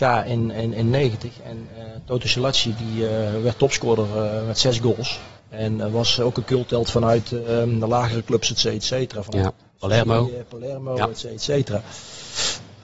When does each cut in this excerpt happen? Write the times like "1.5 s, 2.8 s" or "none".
5.4 s